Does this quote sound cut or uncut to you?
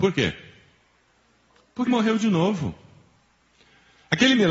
cut